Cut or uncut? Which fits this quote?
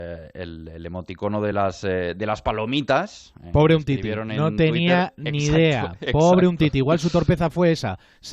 uncut